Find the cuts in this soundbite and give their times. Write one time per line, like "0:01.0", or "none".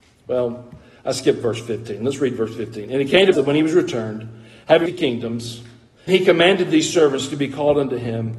0:03.3
0:04.9
0:06.1